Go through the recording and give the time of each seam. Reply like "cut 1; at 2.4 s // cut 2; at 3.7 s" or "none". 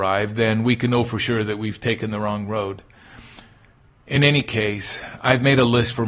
none